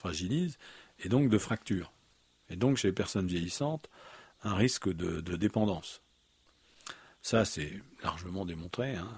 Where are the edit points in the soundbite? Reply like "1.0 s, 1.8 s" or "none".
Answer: none